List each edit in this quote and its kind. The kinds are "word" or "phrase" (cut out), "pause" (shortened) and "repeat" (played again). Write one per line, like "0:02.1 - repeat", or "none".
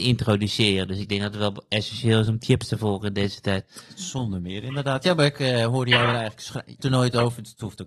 0:06.8 - word